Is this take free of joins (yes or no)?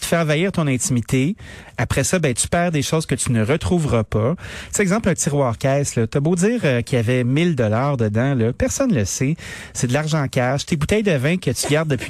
yes